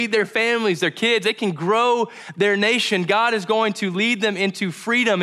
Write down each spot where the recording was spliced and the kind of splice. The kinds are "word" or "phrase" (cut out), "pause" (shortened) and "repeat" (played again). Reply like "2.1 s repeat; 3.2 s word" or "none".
none